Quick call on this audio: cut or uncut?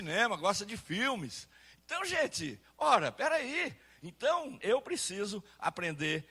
uncut